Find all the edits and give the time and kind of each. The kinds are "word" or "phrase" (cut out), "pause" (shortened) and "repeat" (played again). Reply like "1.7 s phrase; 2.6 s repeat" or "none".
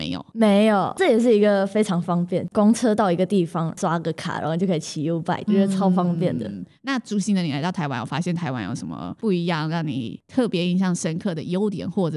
5.5 s word